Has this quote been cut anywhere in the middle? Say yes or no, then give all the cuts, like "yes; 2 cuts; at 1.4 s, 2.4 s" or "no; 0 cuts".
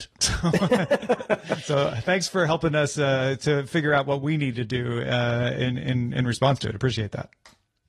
no; 0 cuts